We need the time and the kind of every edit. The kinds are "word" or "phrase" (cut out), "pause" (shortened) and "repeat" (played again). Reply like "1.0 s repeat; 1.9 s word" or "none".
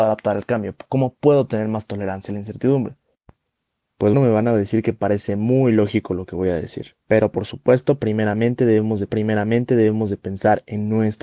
4.1 s word; 7.0 s pause; 9.1 s repeat